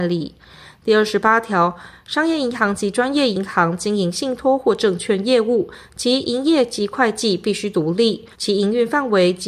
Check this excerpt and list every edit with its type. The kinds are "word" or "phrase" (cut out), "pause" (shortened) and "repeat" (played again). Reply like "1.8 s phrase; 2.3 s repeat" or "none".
8.3 s pause